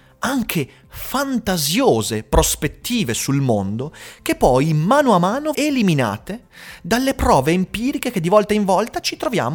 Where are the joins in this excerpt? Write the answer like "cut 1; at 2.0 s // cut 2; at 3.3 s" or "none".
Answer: cut 1; at 5.5 s

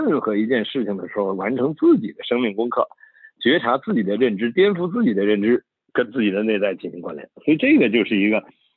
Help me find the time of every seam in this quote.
cut 1; at 5.9 s

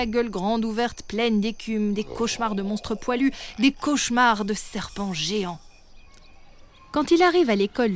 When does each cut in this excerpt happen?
none

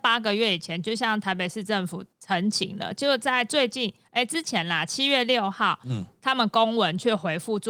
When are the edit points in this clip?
cut 1; at 2.1 s

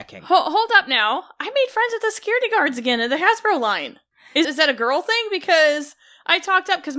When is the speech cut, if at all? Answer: cut 1; at 4.4 s

